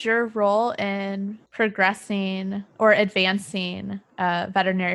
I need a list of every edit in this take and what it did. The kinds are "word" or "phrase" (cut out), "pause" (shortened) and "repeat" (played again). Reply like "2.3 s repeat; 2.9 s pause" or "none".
1.5 s pause